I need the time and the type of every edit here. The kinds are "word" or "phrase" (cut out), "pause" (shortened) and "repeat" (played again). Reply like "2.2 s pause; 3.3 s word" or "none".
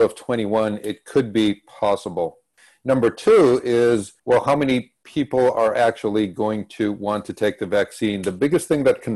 4.2 s pause